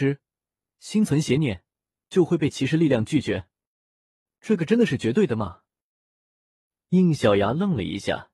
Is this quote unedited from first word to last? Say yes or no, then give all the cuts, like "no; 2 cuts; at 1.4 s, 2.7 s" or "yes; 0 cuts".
yes; 0 cuts